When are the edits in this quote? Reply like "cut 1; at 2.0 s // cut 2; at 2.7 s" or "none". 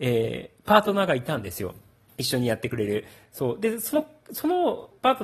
cut 1; at 2.1 s